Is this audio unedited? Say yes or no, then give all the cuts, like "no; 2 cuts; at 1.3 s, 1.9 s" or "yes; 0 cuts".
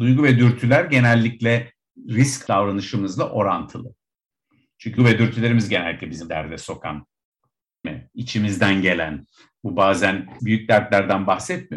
no; 5 cuts; at 2.5 s, 5.0 s, 6.3 s, 7.8 s, 10.4 s